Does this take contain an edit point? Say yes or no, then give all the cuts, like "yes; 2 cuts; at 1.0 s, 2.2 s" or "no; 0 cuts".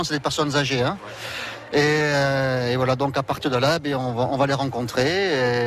no; 0 cuts